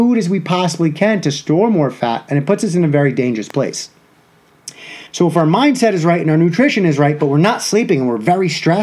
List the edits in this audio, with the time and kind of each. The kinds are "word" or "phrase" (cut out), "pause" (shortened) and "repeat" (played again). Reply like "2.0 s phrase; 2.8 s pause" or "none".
5.1 s pause